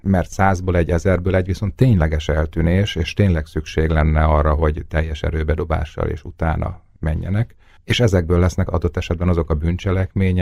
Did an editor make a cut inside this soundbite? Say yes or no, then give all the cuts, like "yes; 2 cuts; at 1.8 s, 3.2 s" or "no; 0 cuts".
no; 0 cuts